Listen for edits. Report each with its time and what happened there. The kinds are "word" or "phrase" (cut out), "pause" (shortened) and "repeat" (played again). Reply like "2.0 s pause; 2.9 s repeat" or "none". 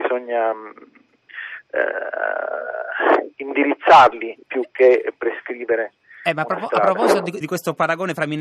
4.4 s pause; 7.4 s word

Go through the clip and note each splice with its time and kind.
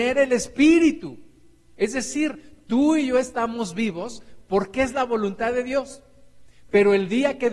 none

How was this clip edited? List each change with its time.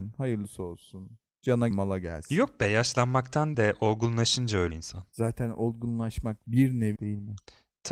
1.7 s word; 3.5 s word; 4.7 s word; 6.4 s word; 7.0 s word

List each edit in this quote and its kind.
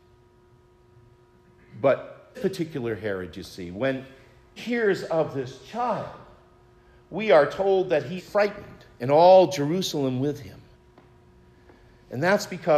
2.3 s word; 4.6 s word; 8.2 s word

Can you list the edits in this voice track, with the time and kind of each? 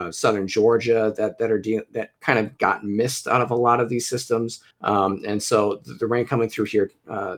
4.7 s pause

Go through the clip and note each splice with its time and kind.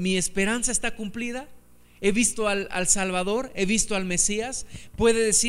none

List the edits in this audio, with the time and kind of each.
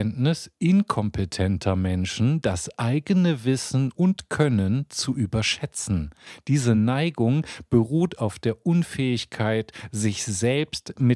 none

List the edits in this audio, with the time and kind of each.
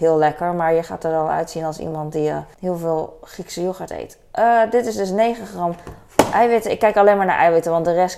2.5 s pause

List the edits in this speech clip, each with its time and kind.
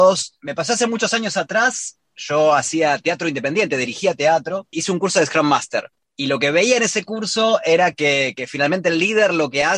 none

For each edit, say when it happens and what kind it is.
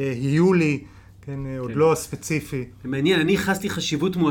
none

